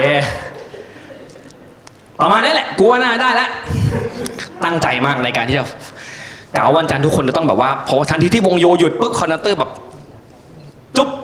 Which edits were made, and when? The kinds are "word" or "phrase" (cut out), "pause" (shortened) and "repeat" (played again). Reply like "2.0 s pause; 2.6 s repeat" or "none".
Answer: none